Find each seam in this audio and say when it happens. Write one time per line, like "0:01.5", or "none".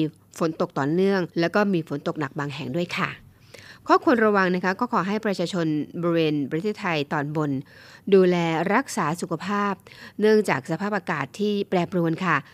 0:01.3